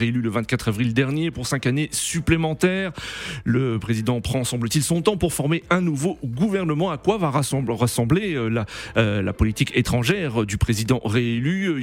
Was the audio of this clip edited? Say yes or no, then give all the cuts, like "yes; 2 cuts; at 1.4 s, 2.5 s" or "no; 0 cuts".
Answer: no; 0 cuts